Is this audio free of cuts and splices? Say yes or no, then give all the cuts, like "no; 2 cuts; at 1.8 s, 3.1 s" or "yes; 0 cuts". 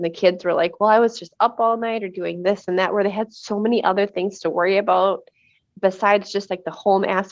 yes; 0 cuts